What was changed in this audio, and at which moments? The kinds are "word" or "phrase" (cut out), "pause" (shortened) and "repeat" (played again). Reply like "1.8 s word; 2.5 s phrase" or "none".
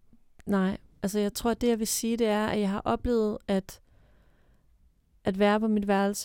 none